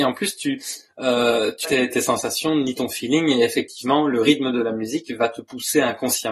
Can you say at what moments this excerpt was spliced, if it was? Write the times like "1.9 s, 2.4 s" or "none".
1.6 s